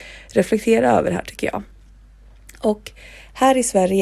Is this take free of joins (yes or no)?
yes